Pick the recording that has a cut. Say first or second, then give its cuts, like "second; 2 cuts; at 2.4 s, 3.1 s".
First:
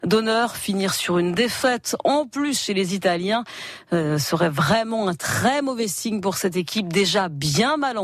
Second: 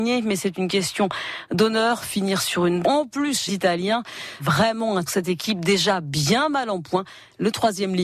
second; 4 cuts; at 2.8 s, 3.5 s, 4.4 s, 5.1 s